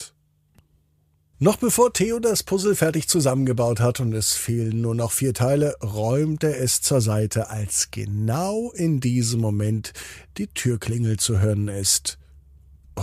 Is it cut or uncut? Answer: uncut